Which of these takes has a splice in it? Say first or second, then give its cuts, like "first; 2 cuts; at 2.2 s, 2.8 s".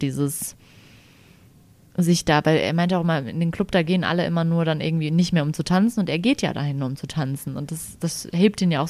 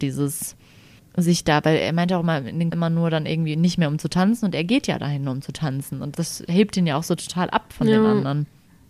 second; 3 cuts; at 1.0 s, 2.7 s, 6.1 s